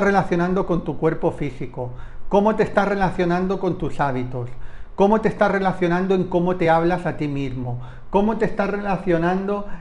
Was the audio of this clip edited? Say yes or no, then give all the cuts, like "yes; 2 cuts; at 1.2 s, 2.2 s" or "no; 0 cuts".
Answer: no; 0 cuts